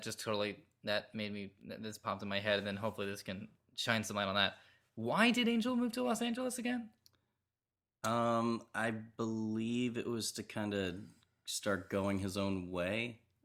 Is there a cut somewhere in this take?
no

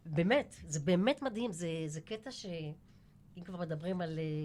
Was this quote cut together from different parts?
no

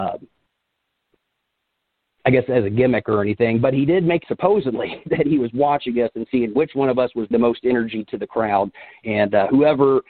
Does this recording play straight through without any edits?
no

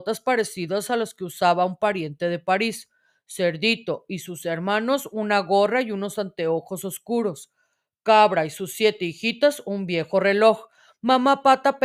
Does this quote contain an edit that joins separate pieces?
no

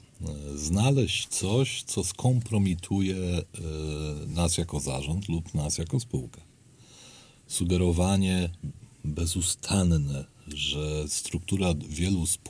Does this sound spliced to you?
no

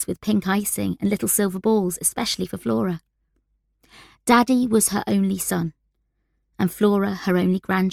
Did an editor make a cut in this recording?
no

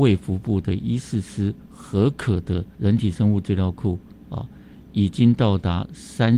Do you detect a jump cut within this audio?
yes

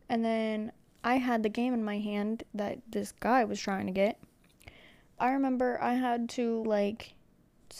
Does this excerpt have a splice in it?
yes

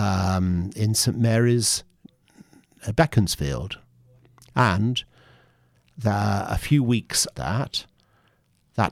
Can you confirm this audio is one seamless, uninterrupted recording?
no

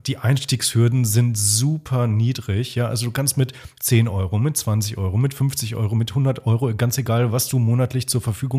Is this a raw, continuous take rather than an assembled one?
yes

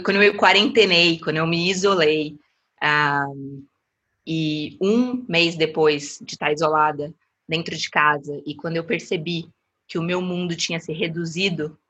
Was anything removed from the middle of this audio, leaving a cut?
no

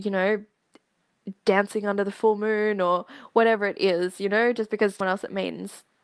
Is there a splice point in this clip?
yes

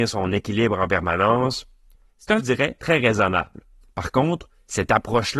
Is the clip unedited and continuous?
no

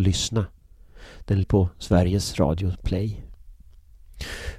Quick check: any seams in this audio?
yes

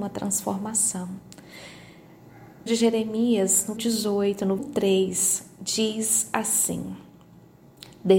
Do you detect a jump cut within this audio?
yes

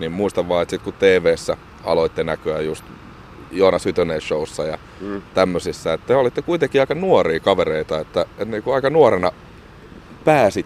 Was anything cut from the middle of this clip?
no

